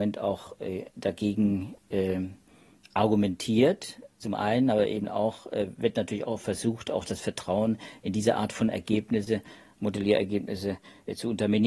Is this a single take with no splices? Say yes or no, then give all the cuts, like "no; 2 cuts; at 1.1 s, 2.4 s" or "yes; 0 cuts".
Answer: yes; 0 cuts